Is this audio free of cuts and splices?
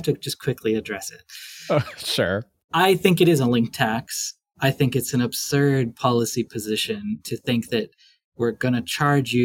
yes; 0 cuts

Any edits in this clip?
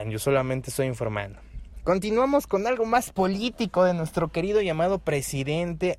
no; 0 cuts

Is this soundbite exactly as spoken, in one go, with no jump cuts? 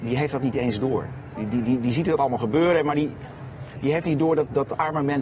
yes; 0 cuts

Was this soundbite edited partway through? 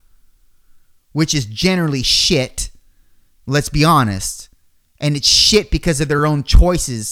no; 0 cuts

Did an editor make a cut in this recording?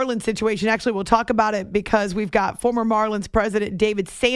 no; 0 cuts

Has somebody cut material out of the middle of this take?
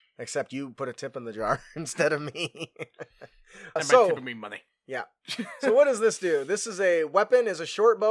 yes; 1 cut; at 3.8 s

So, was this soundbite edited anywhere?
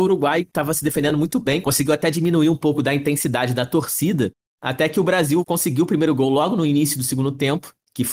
no; 0 cuts

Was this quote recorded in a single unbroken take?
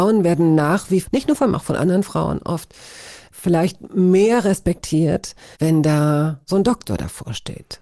no; 5 cuts; at 1.0 s, 1.5 s, 3.3 s, 5.5 s, 6.4 s

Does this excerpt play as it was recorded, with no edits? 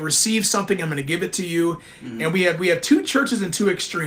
yes; 0 cuts

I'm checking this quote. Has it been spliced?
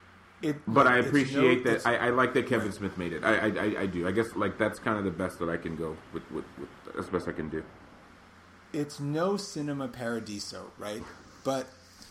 no; 0 cuts

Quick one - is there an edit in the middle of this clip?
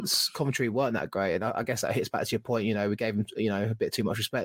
no; 0 cuts

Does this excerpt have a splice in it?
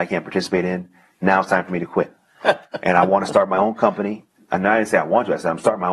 no; 0 cuts

